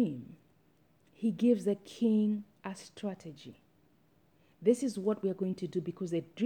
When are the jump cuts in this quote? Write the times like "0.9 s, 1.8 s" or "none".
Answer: none